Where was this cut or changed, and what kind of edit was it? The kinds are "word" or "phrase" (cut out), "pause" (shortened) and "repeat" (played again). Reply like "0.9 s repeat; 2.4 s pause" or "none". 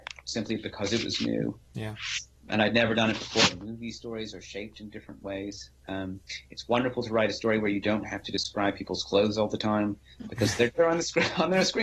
10.7 s word